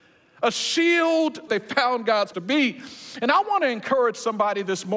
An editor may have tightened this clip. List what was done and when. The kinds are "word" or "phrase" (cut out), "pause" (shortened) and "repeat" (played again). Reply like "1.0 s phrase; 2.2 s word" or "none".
1.5 s phrase; 2.3 s word